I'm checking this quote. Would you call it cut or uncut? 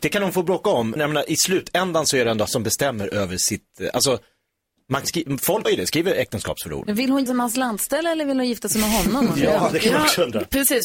cut